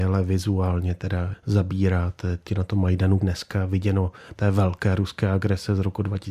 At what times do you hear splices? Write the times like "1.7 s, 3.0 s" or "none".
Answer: 1.3 s, 2.5 s, 3.2 s, 4.4 s